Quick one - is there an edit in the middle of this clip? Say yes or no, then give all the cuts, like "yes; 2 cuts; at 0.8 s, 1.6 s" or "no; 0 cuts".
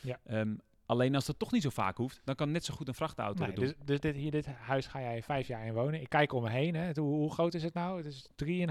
no; 0 cuts